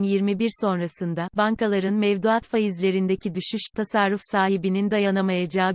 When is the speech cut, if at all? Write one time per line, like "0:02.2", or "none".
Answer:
none